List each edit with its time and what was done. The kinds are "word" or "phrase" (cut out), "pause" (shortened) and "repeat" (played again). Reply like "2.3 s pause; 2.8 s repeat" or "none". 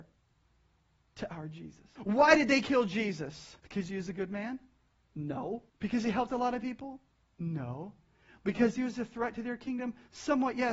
2.0 s pause; 3.6 s pause; 5.7 s pause